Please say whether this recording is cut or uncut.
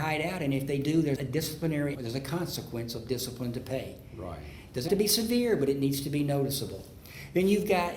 cut